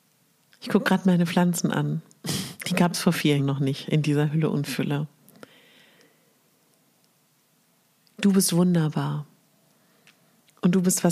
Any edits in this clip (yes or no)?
yes